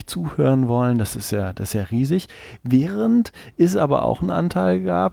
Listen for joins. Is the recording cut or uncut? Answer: uncut